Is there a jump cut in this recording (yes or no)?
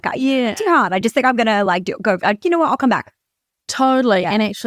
no